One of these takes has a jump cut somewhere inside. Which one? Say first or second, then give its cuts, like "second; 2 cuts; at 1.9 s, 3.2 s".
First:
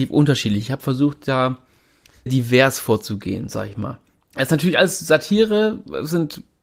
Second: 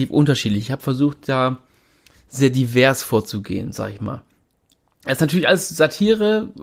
first; 2 cuts; at 2.3 s, 4.2 s